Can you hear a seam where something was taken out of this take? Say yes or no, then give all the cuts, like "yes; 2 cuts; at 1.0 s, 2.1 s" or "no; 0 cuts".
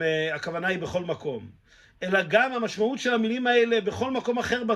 no; 0 cuts